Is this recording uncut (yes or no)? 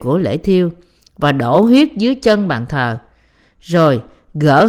yes